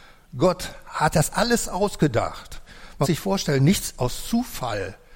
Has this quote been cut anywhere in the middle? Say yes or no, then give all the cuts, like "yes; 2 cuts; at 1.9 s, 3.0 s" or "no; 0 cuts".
yes; 3 cuts; at 1.1 s, 3.0 s, 3.9 s